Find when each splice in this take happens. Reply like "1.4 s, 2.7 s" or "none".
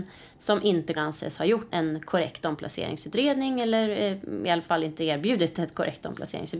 1.0 s, 1.7 s

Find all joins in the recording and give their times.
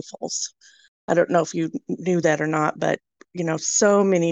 none

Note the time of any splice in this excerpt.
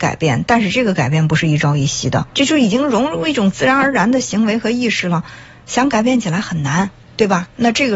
2.3 s

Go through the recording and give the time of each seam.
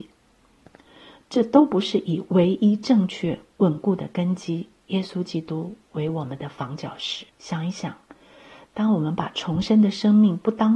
7.3 s

